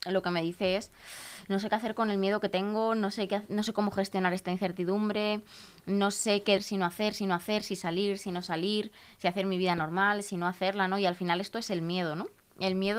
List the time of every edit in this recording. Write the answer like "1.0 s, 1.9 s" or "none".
6.6 s, 7.2 s

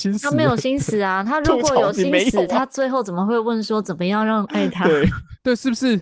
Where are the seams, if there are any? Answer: 4.5 s

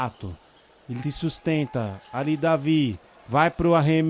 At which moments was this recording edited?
1.0 s, 3.2 s

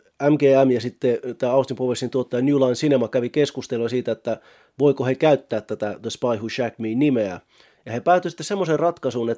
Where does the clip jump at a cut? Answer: none

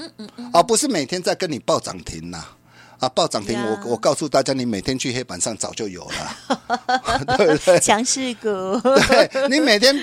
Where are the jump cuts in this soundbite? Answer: none

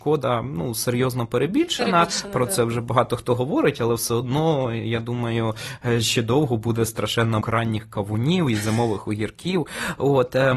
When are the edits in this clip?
7.4 s

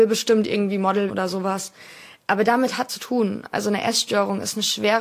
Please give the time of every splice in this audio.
1.1 s, 2.9 s

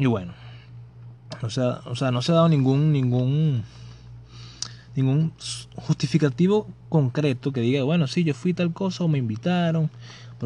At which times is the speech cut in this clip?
none

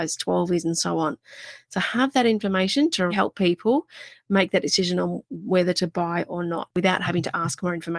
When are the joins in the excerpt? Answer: 3.1 s

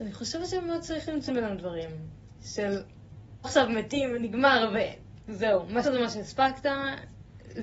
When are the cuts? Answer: 1.3 s, 3.4 s, 5.8 s

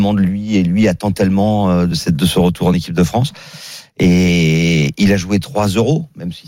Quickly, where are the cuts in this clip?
none

